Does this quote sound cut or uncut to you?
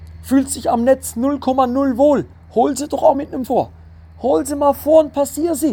cut